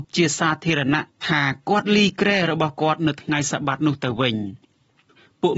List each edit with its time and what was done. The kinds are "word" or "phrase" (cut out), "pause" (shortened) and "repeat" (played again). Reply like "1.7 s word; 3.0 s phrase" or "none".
none